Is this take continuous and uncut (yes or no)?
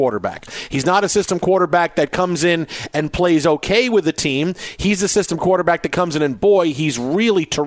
yes